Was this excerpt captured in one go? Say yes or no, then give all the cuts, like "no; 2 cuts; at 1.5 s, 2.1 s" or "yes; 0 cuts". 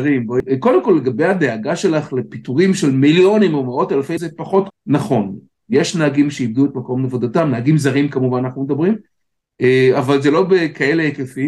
no; 2 cuts; at 4.2 s, 4.7 s